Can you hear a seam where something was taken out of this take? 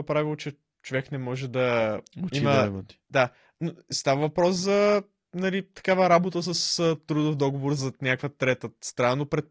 no; 0 cuts

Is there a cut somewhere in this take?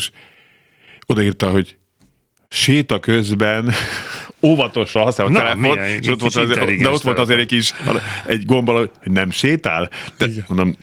no; 0 cuts

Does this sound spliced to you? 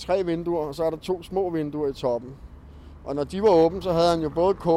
no; 0 cuts

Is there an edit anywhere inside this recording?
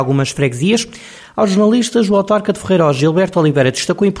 no; 0 cuts

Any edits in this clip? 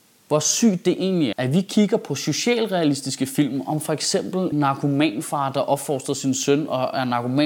yes; 2 cuts; at 1.3 s, 4.5 s

